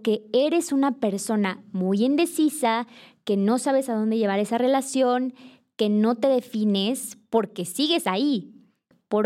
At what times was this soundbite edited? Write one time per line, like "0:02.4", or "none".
none